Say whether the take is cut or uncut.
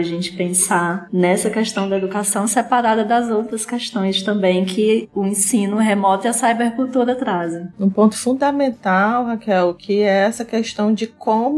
uncut